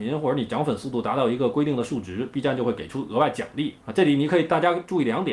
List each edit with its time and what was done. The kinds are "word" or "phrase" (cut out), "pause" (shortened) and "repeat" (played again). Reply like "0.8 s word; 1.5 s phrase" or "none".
3.8 s pause